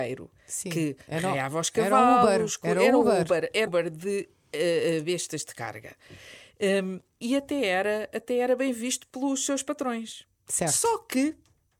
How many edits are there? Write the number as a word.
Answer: two